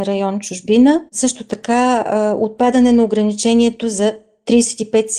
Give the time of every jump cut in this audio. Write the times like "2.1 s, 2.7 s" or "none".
1.1 s